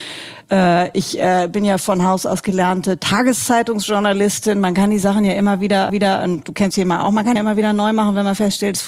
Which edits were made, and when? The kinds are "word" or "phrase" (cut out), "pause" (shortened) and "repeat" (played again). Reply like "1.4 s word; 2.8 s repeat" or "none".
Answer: 5.9 s repeat; 6.7 s word; 7.4 s phrase